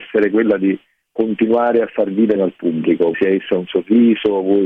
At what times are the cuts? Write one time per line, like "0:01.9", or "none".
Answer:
0:02.4
0:03.1

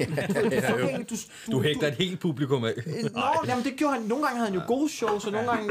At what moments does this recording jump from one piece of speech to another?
0:01.4
0:03.4

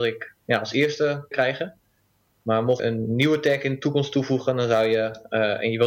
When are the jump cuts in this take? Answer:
0:01.3
0:02.8

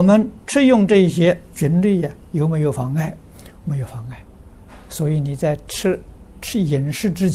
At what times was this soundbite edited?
none

